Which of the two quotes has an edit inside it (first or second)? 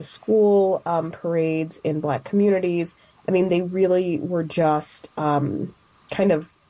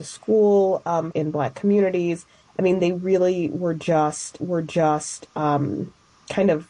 second